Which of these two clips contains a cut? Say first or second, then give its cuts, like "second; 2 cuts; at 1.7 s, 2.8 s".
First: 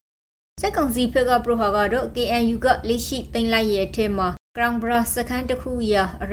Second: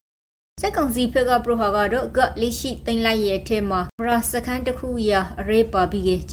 second; 2 cuts; at 2.1 s, 4.0 s